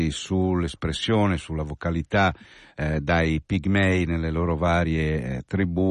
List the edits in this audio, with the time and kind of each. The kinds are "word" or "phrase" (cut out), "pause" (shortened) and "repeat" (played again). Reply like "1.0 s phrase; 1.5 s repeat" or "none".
none